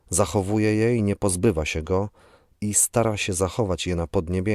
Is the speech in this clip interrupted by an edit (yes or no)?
no